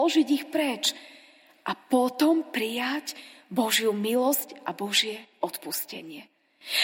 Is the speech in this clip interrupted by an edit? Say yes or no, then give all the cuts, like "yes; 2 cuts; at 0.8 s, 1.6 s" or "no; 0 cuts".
no; 0 cuts